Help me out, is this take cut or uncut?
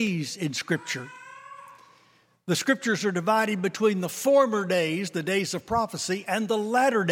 uncut